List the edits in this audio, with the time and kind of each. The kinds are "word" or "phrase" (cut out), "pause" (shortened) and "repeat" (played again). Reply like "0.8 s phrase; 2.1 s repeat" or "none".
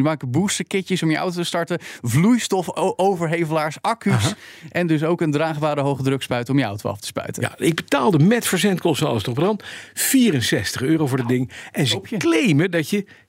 none